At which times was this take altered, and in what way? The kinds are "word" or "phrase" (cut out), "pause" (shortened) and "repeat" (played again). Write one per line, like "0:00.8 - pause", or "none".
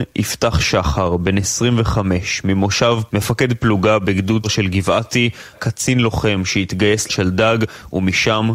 0:03.1 - word
0:04.4 - word
0:05.5 - word
0:07.1 - word